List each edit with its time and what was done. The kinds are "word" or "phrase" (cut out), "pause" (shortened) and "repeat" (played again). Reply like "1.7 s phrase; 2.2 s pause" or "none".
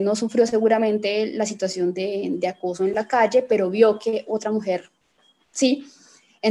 none